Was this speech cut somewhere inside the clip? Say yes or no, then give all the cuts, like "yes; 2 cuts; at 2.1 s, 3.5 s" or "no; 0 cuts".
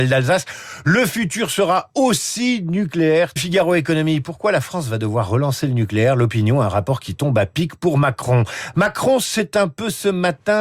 yes; 1 cut; at 3.4 s